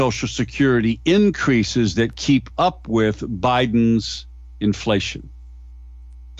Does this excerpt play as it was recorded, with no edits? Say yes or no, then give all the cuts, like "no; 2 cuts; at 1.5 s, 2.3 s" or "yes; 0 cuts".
yes; 0 cuts